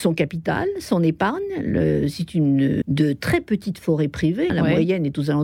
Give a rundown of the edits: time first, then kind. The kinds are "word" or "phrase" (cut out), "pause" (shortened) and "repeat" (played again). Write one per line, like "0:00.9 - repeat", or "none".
0:02.8 - word
0:04.5 - word